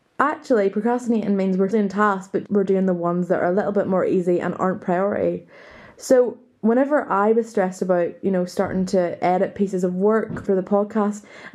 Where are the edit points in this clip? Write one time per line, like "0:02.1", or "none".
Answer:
0:01.7
0:02.5
0:10.5